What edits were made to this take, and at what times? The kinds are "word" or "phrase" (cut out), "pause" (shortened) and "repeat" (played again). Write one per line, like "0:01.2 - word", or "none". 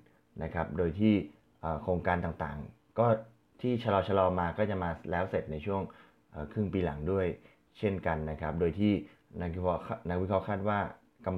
none